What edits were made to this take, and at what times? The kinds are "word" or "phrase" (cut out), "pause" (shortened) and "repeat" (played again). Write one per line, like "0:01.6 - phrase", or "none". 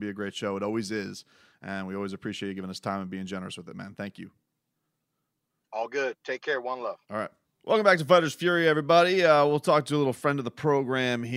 0:07.4 - pause